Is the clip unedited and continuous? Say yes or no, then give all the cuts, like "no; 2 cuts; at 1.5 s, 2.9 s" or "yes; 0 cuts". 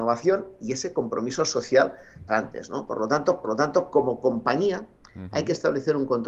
no; 2 cuts; at 2.3 s, 3.4 s